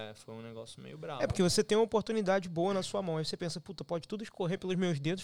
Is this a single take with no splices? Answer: yes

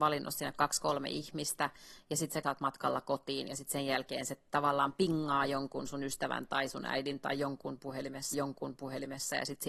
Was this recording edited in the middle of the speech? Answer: yes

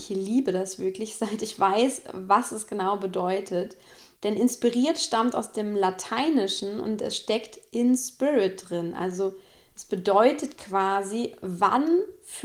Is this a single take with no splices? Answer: yes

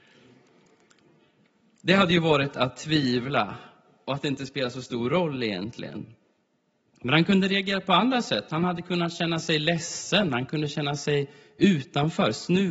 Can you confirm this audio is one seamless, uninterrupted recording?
yes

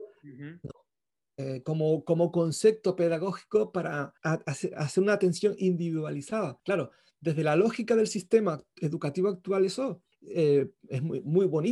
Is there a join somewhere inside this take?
yes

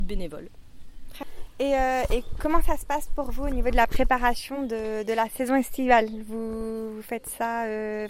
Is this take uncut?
yes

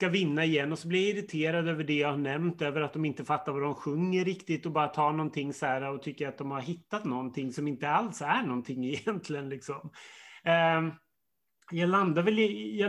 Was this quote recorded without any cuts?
yes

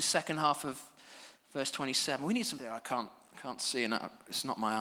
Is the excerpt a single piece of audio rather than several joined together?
no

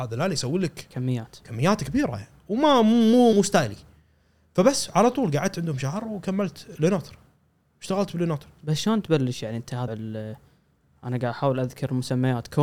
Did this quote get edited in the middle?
yes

